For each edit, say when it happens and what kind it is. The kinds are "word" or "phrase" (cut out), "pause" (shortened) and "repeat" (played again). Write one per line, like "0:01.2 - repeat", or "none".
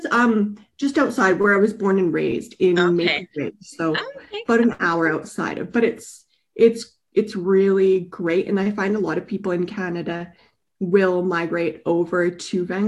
none

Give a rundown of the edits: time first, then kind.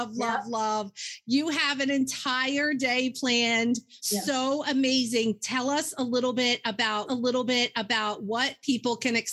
0:04.0 - pause
0:07.1 - repeat

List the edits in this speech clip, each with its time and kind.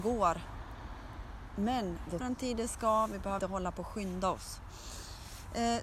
0:02.2 - word
0:03.4 - word

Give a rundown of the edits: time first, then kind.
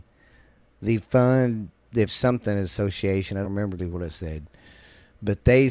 0:02.1 - word
0:03.4 - word
0:03.8 - word

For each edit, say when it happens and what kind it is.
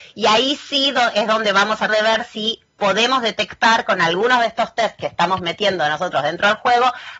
0:01.9 - word

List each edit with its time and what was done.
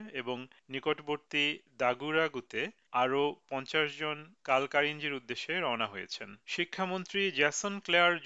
0:06.4 - pause

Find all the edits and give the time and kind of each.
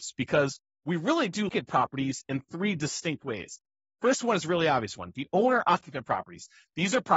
0:01.5 - word

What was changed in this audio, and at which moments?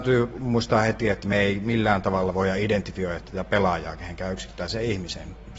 none

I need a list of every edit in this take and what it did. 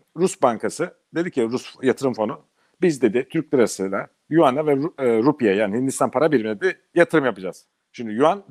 none

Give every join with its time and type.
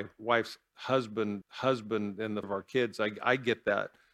0:01.4 - repeat
0:02.4 - word

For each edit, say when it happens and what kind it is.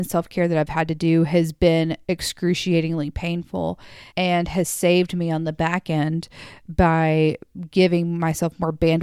0:04.1 - pause

